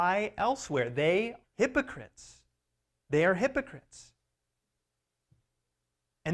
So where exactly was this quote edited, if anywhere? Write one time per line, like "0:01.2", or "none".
0:01.4